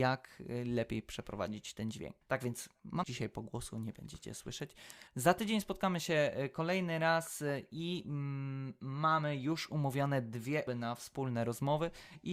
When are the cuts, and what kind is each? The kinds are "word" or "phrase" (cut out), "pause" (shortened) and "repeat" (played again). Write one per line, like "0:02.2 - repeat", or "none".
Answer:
0:02.2 - pause
0:03.0 - phrase
0:05.1 - pause
0:10.7 - word